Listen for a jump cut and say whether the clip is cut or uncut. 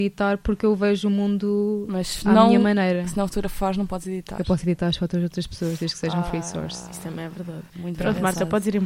cut